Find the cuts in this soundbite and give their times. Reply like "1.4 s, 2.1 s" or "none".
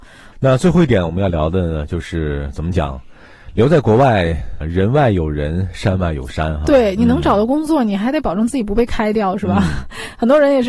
4.6 s